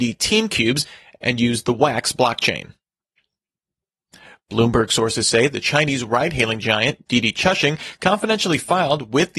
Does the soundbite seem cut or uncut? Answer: uncut